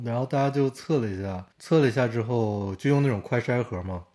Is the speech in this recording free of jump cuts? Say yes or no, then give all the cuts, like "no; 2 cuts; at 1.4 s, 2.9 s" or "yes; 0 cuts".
no; 1 cut; at 1.5 s